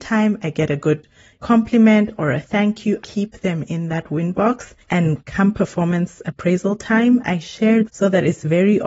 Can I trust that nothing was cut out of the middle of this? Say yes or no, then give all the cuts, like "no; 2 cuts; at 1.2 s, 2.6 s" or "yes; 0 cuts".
no; 3 cuts; at 3.0 s, 4.8 s, 7.9 s